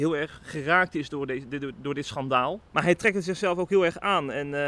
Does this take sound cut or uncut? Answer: cut